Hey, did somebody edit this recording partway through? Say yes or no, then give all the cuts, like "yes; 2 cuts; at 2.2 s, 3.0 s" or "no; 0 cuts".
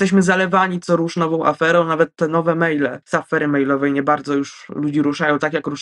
yes; 1 cut; at 3.0 s